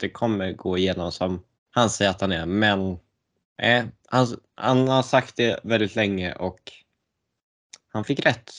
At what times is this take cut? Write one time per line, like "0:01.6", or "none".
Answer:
0:01.6
0:03.4